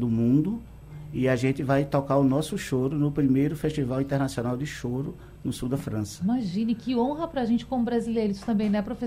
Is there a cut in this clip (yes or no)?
no